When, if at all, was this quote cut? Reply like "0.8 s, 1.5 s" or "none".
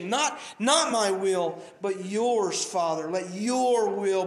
none